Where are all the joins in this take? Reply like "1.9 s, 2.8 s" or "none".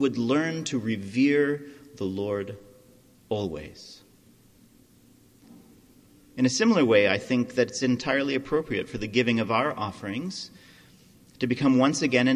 none